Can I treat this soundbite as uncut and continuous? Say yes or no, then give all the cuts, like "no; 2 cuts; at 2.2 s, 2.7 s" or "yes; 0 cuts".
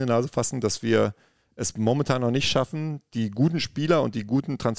yes; 0 cuts